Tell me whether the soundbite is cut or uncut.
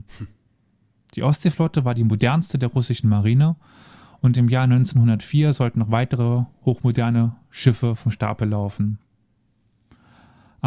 uncut